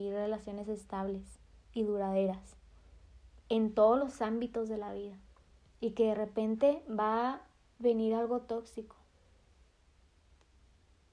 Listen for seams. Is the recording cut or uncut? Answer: uncut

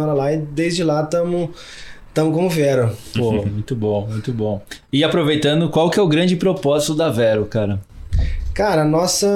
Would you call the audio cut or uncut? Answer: uncut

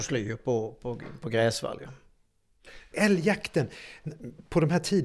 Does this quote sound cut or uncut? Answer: cut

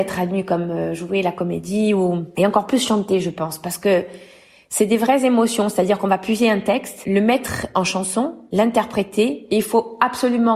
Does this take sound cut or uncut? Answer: uncut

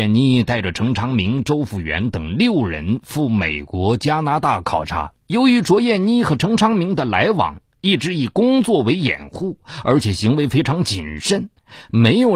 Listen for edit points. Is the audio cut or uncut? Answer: cut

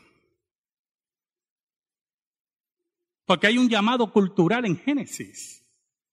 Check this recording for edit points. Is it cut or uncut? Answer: uncut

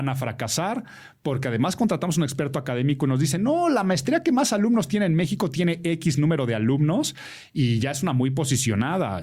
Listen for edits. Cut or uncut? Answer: uncut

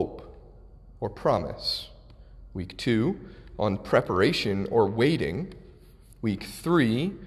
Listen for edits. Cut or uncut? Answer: uncut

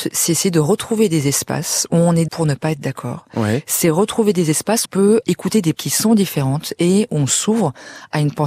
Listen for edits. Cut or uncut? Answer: cut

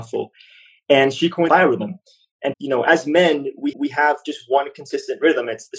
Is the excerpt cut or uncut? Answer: cut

